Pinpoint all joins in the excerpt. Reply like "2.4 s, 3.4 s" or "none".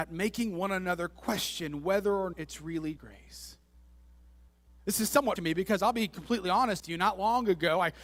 2.3 s, 3.0 s, 5.4 s, 6.8 s